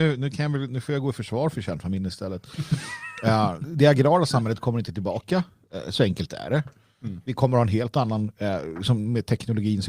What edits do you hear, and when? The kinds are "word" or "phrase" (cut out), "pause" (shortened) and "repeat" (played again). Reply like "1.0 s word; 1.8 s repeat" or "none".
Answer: none